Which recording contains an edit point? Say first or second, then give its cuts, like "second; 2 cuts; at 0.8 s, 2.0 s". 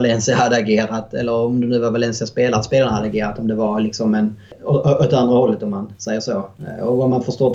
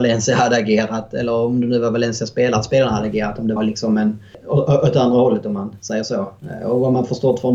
second; 1 cut; at 3.6 s